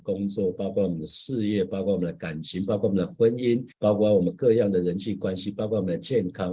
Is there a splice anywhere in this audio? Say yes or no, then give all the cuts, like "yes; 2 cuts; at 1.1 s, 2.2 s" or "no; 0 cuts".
yes; 1 cut; at 3.7 s